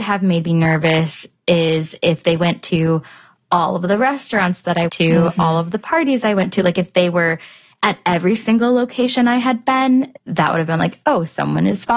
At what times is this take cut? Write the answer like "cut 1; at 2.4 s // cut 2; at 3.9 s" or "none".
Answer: cut 1; at 4.9 s // cut 2; at 10.2 s